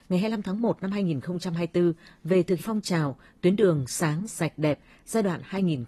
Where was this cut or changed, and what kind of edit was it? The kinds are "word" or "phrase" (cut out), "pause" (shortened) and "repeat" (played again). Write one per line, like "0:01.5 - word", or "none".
0:02.6 - word
0:04.3 - word